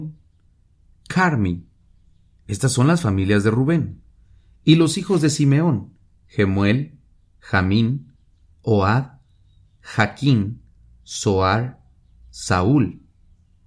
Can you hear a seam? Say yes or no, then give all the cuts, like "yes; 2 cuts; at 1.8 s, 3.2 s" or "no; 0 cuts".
no; 0 cuts